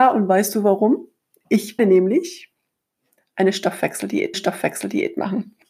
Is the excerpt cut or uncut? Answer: cut